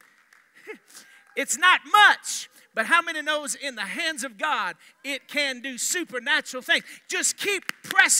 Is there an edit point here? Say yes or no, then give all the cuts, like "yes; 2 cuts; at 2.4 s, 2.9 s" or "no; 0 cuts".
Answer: no; 0 cuts